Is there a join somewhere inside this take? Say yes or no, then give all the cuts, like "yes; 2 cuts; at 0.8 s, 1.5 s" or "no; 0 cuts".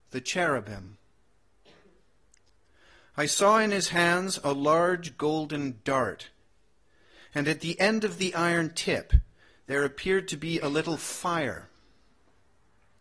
no; 0 cuts